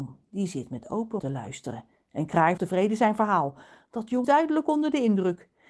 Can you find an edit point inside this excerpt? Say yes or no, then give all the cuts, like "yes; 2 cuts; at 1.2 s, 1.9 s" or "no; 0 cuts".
yes; 3 cuts; at 1.2 s, 2.6 s, 4.2 s